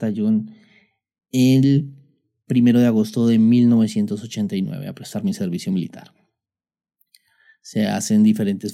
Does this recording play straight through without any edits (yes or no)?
yes